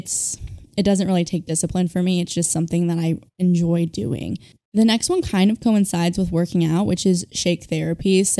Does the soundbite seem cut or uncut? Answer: uncut